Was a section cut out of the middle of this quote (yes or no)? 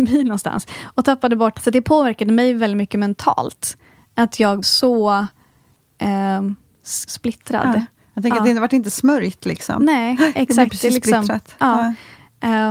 yes